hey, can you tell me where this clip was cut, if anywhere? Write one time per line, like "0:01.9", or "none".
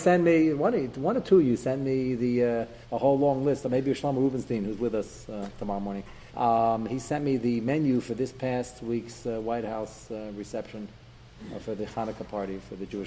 0:02.8
0:06.3

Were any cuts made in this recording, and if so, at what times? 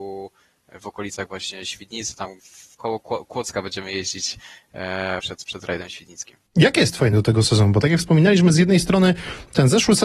0:02.4
0:02.7
0:05.2
0:06.5
0:07.1

